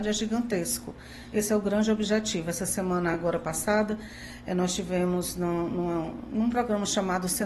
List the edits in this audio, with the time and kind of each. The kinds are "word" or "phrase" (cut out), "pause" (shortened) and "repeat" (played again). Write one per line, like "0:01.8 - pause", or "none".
none